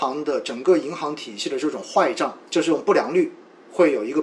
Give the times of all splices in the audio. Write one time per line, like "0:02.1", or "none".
0:02.5